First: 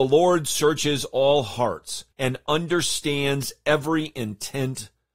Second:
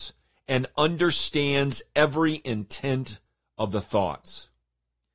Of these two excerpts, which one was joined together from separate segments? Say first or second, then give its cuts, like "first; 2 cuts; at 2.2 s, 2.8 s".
first; 1 cut; at 2.1 s